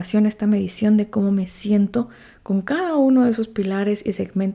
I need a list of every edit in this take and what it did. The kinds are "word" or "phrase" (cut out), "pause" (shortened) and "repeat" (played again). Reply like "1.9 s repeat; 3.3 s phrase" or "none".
none